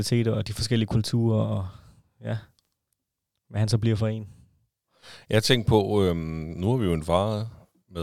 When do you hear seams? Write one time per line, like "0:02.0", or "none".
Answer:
none